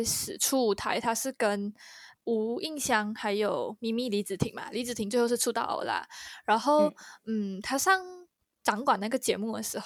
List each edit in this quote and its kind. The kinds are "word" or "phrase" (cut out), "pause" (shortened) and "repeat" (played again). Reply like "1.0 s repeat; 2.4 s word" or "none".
2.1 s word